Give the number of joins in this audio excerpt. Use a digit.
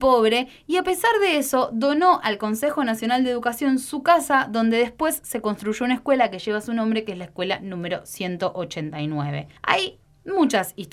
1